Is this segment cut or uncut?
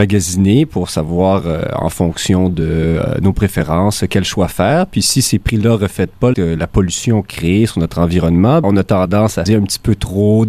cut